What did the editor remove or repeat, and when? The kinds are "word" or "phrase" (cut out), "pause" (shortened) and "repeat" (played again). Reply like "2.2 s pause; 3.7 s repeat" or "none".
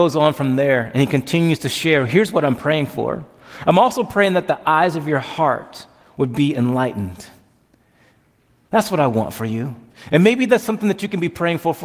none